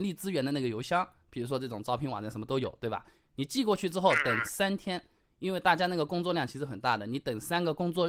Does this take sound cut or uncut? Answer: uncut